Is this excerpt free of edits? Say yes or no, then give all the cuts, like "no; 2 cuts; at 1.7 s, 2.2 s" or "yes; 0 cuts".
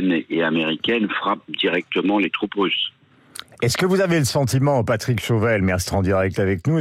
no; 1 cut; at 5.9 s